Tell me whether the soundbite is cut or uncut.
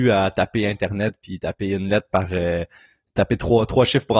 uncut